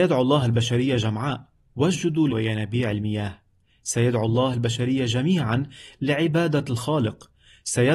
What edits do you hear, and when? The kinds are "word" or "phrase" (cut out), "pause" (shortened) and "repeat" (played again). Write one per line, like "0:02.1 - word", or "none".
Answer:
0:02.3 - phrase